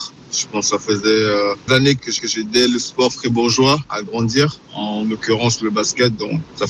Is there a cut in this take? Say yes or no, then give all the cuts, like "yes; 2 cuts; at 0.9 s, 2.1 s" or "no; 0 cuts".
yes; 2 cuts; at 1.7 s, 2.2 s